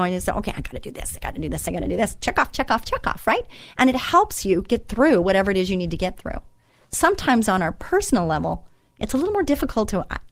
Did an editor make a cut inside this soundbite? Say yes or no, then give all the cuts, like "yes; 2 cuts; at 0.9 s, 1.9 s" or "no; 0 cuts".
no; 0 cuts